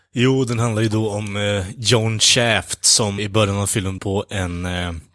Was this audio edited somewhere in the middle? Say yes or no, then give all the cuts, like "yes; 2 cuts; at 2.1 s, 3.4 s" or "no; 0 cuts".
yes; 2 cuts; at 3.2 s, 4.0 s